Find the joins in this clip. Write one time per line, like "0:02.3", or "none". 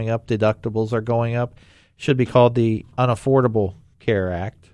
none